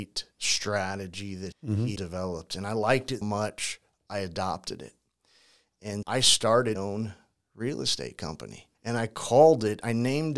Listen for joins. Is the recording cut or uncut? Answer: cut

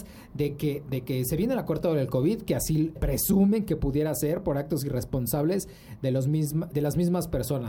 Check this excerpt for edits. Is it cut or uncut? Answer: cut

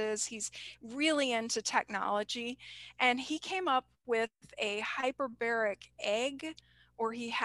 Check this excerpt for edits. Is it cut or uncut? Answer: uncut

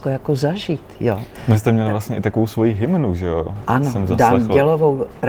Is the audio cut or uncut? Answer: uncut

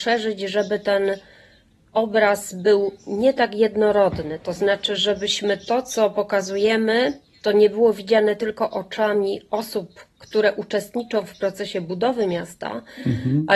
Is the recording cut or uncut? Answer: uncut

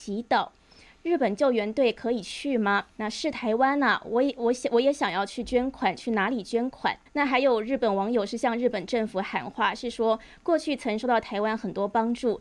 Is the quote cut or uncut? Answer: cut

